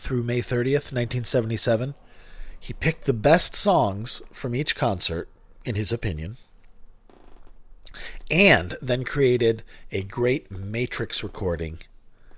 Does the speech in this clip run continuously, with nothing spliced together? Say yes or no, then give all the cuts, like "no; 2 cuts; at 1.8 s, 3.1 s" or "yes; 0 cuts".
yes; 0 cuts